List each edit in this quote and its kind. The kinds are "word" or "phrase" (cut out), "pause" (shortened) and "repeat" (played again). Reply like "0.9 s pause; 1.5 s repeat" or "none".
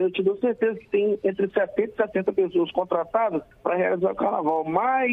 3.5 s pause